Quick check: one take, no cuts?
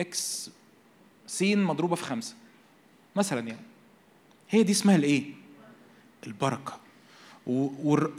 yes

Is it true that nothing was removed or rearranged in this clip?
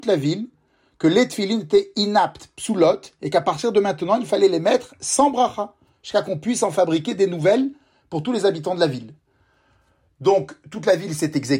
yes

